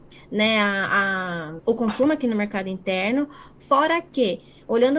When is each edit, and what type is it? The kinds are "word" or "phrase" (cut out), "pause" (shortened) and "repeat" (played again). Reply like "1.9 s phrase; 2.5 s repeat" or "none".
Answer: 1.6 s word